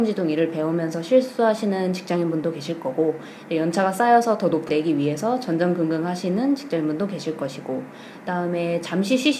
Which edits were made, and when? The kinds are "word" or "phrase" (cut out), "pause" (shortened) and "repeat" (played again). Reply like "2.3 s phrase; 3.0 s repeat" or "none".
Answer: 4.7 s word